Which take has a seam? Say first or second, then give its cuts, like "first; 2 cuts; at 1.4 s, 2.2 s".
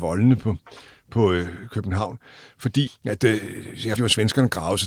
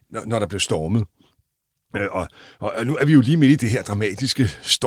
first; 2 cuts; at 2.9 s, 4.0 s